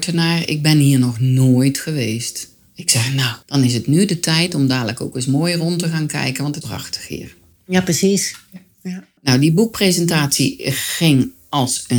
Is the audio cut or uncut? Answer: cut